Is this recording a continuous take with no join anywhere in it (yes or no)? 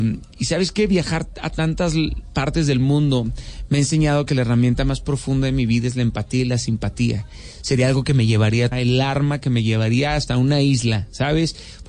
no